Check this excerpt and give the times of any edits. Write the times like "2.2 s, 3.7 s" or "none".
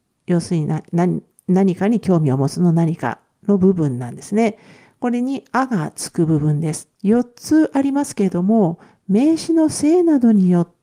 1.3 s, 6.9 s